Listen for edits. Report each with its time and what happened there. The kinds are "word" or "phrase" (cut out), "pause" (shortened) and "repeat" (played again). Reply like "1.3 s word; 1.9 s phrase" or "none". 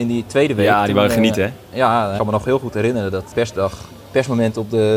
2.2 s phrase; 3.3 s word